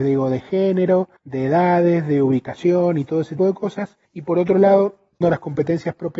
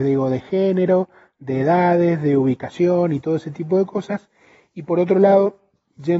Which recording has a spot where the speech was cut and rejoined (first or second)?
first